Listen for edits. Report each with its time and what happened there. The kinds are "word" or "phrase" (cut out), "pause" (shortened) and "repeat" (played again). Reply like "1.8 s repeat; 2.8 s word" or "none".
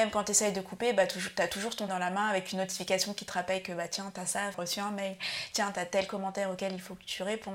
1.9 s word; 4.5 s phrase